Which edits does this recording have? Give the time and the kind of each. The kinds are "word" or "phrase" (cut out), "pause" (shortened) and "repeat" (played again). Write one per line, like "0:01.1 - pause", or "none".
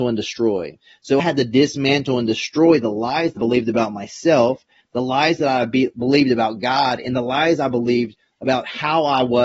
0:01.2 - word
0:03.4 - word